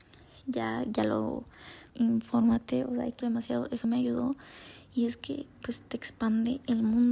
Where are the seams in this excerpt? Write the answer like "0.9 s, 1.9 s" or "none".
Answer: 1.9 s, 3.2 s, 3.8 s